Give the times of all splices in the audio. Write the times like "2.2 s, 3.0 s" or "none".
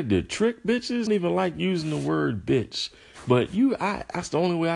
1.1 s